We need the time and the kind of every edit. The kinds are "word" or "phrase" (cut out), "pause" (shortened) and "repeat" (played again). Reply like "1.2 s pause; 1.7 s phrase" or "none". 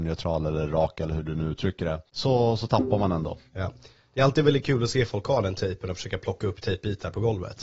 2.1 s pause; 3.5 s pause